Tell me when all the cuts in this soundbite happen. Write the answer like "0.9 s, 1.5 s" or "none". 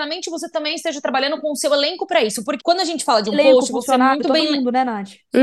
2.6 s